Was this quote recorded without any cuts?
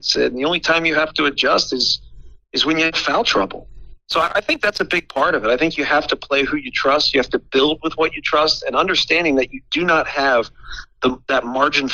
yes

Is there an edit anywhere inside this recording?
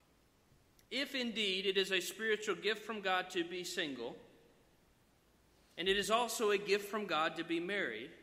no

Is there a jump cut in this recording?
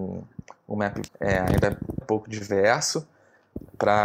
yes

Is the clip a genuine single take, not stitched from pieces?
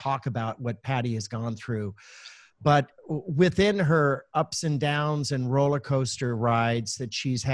no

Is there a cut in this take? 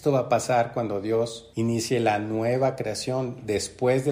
no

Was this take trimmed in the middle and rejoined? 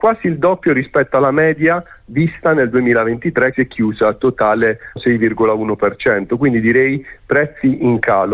yes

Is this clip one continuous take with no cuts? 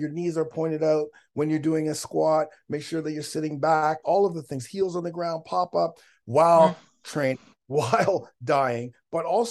no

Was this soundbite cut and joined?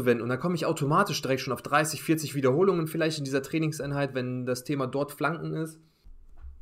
no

